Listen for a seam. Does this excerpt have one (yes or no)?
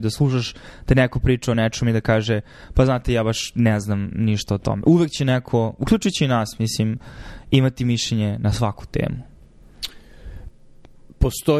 no